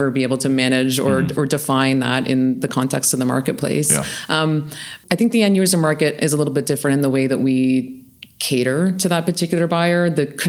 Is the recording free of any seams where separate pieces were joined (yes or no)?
yes